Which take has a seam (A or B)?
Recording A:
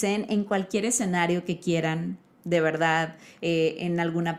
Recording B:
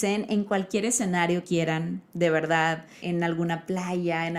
B